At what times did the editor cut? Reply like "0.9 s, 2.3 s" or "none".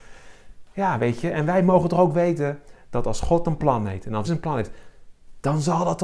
4.2 s